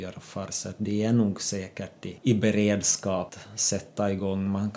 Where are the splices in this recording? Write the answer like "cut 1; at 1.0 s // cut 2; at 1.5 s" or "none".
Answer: none

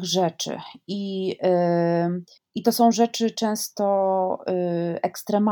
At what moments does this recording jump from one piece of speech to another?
cut 1; at 2.4 s

